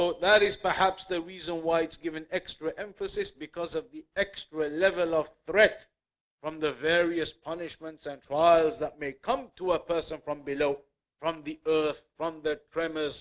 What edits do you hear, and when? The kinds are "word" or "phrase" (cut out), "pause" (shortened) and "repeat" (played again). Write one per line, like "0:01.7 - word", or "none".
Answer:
none